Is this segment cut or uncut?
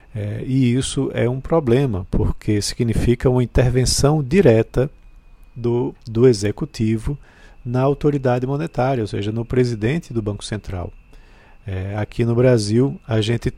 cut